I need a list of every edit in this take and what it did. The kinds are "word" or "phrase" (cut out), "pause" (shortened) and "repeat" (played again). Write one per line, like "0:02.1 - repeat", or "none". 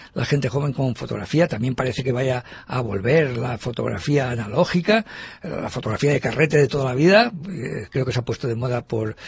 none